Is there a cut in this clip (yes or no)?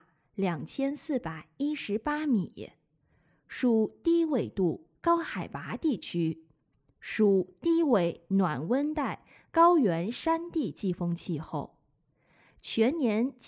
no